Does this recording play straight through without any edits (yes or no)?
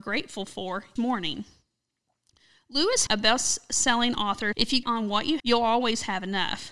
no